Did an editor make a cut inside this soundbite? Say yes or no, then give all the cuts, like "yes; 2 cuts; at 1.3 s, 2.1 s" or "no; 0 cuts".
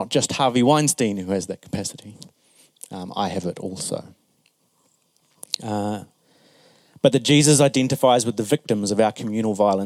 no; 0 cuts